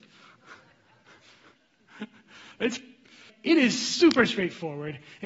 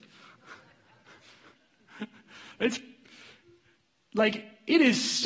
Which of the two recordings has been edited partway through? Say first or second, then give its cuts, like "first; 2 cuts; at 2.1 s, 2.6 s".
first; 1 cut; at 3.3 s